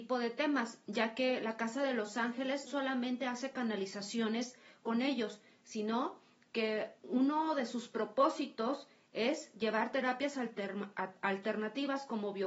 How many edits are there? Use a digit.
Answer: 2